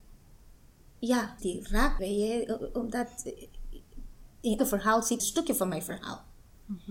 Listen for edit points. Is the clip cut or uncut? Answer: cut